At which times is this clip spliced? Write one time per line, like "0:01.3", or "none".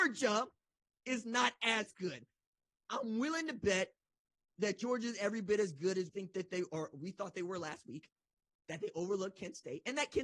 0:06.1